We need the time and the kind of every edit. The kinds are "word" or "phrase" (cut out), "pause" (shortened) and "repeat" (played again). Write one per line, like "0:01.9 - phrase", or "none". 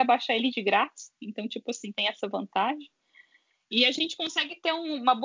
none